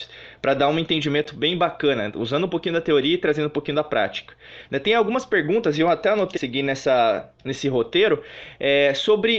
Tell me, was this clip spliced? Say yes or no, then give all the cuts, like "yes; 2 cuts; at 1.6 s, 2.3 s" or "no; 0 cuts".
yes; 2 cuts; at 6.4 s, 7.4 s